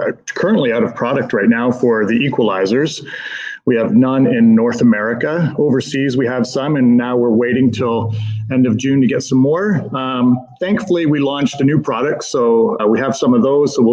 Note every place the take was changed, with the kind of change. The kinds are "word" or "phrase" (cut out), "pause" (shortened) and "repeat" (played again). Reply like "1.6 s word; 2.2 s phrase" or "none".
12.8 s word